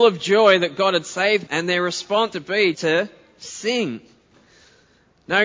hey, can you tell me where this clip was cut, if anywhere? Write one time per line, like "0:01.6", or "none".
0:01.5
0:02.3
0:02.7